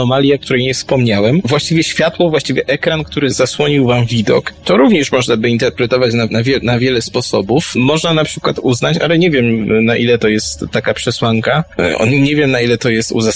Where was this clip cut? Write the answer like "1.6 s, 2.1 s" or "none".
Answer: 6.3 s